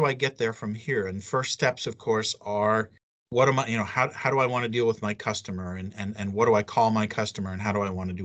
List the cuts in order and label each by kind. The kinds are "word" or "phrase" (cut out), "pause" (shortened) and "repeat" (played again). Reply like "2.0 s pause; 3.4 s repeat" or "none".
none